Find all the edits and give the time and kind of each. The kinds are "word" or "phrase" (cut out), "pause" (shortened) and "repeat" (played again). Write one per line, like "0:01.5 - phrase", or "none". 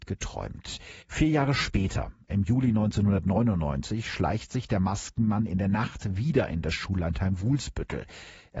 0:01.0 - pause